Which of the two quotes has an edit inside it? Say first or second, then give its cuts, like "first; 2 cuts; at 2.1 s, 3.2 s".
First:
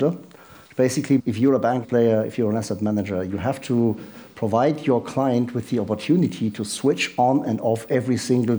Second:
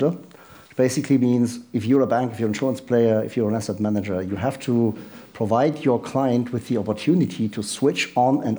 first; 2 cuts; at 1.2 s, 1.8 s